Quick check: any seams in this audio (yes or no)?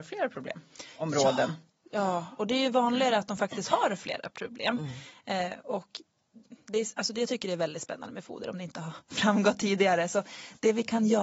no